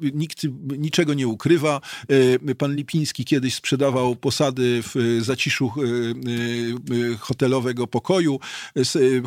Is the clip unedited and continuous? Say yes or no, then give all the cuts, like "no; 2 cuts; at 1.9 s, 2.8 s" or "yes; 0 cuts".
yes; 0 cuts